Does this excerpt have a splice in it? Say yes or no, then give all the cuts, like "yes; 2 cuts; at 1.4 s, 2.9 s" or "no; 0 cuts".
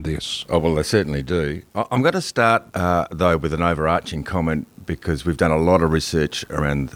yes; 1 cut; at 2.7 s